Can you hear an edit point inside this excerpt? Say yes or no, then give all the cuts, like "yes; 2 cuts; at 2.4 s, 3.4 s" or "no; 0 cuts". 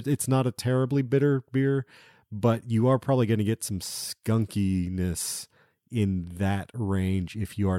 no; 0 cuts